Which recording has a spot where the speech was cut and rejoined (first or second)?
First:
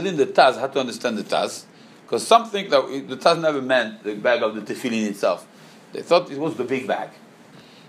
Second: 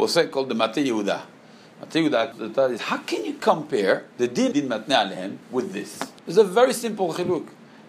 second